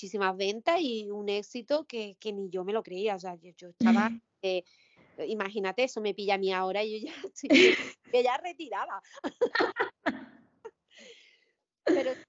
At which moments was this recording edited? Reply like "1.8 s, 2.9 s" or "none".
none